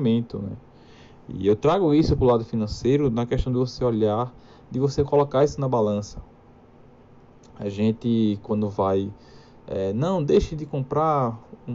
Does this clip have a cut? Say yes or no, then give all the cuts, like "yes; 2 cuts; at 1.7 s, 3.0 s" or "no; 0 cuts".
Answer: no; 0 cuts